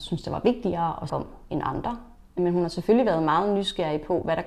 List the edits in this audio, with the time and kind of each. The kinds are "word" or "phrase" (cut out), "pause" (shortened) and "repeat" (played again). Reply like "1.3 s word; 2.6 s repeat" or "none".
1.1 s word